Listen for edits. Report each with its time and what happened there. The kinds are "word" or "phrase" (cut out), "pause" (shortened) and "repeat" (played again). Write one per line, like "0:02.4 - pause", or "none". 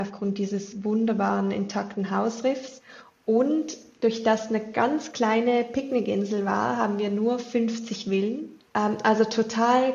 0:08.7 - pause